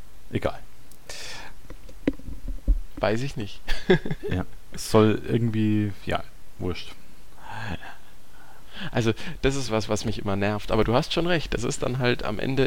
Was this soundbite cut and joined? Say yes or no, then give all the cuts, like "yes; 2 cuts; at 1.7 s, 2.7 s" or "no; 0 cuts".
no; 0 cuts